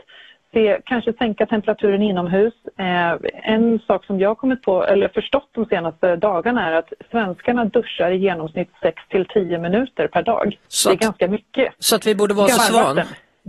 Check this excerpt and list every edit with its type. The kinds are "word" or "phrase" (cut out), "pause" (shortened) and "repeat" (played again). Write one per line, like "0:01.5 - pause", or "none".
0:03.4 - word
0:10.6 - pause
0:12.6 - phrase

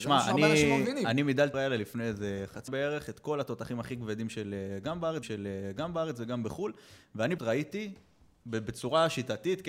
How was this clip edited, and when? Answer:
0:01.5 - phrase
0:02.7 - word
0:05.2 - repeat
0:07.4 - word

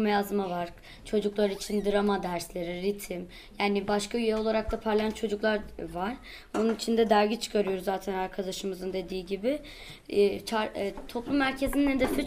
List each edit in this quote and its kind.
none

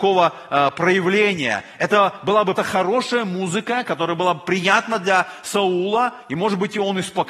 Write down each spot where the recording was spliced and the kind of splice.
0:02.6 - word

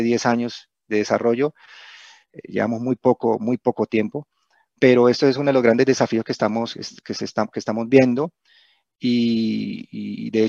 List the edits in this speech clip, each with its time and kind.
none

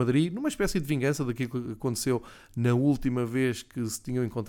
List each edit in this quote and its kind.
none

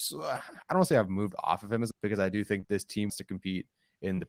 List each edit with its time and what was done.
0:01.9 - phrase
0:02.6 - word
0:03.1 - word

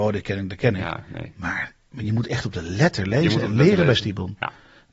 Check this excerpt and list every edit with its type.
none

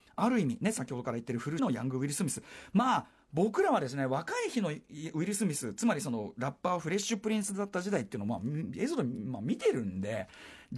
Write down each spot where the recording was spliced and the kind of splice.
0:01.6 - word

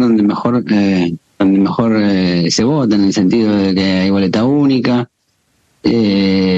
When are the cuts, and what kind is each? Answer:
0:01.3 - pause

